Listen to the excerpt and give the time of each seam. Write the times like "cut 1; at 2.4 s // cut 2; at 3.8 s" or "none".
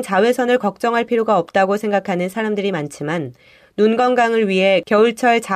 none